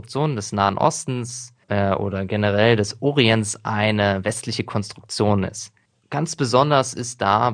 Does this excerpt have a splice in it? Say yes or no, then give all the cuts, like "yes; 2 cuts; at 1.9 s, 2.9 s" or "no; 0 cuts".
yes; 2 cuts; at 1.6 s, 5.8 s